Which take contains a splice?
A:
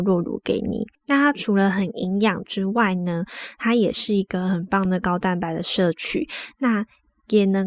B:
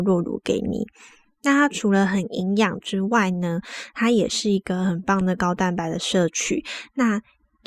A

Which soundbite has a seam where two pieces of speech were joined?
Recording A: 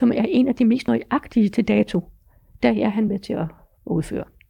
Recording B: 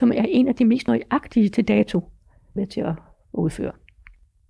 B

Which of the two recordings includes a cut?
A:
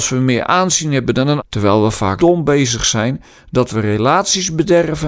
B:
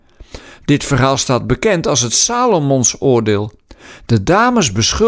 A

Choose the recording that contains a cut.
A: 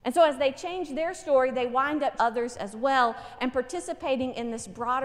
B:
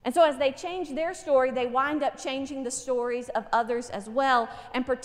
A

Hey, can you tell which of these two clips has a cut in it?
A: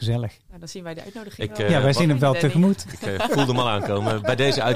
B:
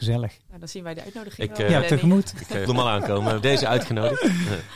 B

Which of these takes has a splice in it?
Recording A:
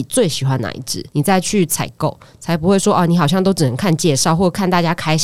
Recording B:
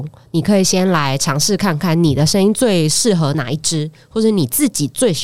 A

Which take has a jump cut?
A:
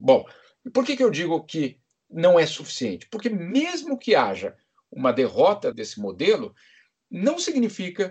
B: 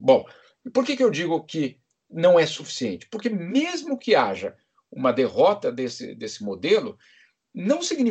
A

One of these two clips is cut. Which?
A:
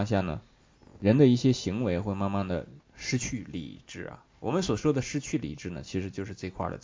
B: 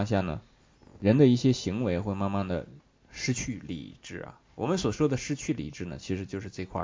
A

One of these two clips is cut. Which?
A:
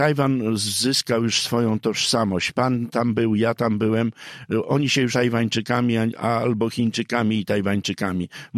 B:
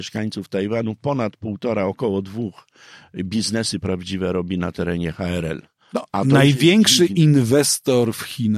A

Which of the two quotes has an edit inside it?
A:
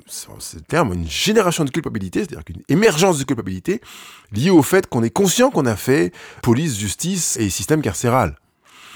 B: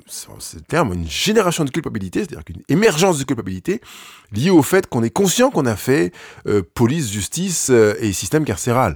A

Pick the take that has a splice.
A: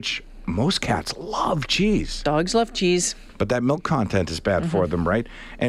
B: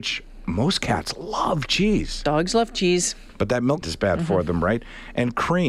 B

